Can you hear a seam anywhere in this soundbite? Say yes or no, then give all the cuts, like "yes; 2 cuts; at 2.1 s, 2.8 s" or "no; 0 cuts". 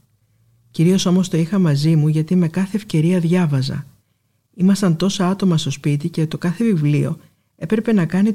no; 0 cuts